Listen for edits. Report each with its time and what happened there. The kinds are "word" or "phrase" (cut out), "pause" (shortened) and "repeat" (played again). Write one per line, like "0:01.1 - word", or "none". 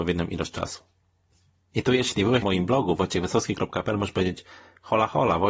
0:02.4 - phrase